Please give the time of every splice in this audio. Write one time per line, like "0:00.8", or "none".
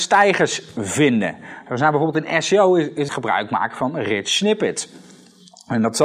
0:03.1